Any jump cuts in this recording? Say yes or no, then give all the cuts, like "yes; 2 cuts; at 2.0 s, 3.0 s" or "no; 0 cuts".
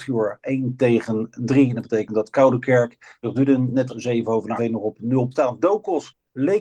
yes; 4 cuts; at 3.2 s, 3.9 s, 4.6 s, 5.3 s